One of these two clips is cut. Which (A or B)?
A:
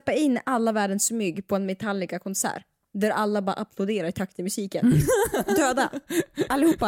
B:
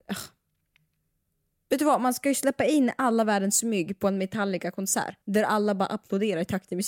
B